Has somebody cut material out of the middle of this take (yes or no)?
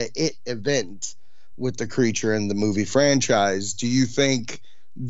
no